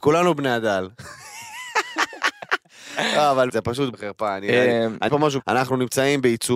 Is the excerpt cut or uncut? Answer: cut